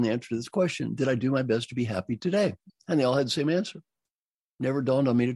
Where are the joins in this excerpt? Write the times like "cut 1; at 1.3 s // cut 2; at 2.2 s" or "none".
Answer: cut 1; at 2.7 s